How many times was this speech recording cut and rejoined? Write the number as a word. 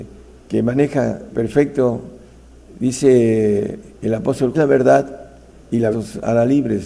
five